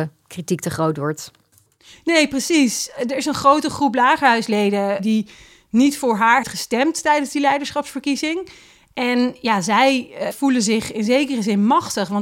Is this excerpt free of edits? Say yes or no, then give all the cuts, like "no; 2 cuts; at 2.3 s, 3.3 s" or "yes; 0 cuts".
no; 2 cuts; at 6.4 s, 10.3 s